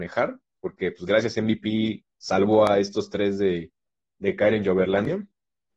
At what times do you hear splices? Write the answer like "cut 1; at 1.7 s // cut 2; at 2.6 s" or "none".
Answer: none